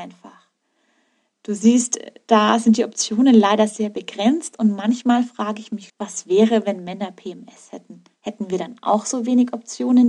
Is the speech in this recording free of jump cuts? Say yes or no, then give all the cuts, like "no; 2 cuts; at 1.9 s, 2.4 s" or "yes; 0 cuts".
no; 1 cut; at 5.9 s